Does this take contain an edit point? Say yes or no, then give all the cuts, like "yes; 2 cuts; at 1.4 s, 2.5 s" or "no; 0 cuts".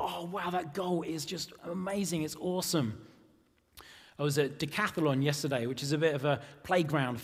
no; 0 cuts